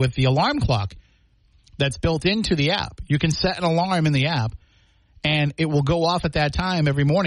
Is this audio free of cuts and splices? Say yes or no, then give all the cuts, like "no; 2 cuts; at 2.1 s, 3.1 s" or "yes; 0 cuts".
yes; 0 cuts